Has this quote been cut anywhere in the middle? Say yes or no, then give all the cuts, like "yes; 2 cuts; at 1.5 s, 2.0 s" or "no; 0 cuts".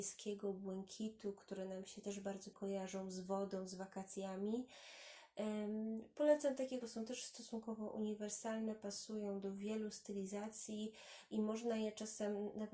yes; 2 cuts; at 2.5 s, 6.8 s